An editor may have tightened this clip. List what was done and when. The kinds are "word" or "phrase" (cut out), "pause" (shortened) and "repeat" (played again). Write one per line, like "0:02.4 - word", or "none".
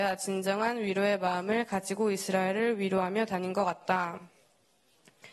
none

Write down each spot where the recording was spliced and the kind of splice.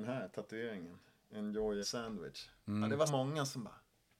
0:01.8 - word
0:03.1 - word

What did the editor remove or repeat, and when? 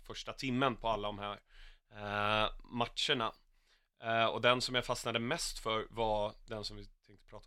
none

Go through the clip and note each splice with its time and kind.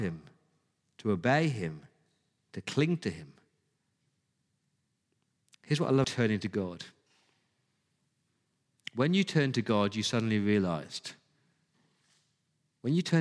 0:06.0 - word

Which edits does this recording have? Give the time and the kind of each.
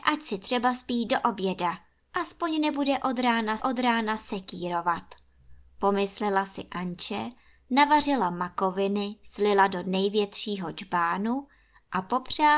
0:03.6 - repeat

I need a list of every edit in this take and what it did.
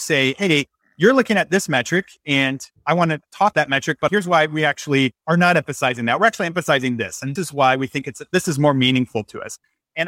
0:03.5 - word
0:04.1 - word
0:05.2 - pause
0:07.4 - word

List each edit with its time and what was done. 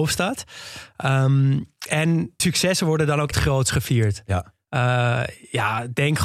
0:02.4 - word
0:03.3 - word

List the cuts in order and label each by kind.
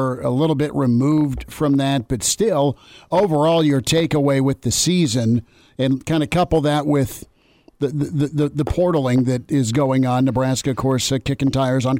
none

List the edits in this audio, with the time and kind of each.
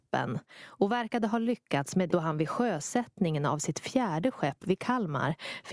0:02.1 - word

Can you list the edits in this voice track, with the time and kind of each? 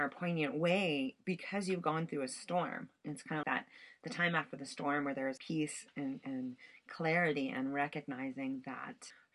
0:03.4 - word
0:05.4 - word

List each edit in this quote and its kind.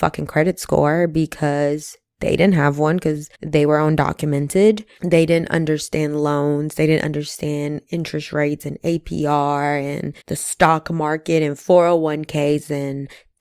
0:03.3 - pause
0:10.2 - pause

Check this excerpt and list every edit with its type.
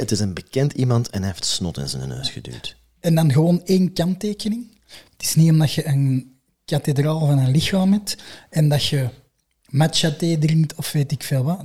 none

